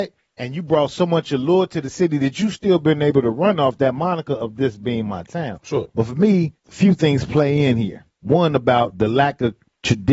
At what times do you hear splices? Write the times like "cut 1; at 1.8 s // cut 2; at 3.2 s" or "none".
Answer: cut 1; at 6.6 s // cut 2; at 8.1 s